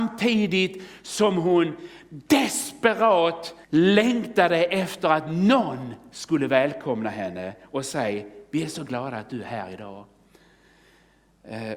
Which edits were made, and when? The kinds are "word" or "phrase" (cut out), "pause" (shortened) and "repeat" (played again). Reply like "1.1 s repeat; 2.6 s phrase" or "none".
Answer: 3.6 s pause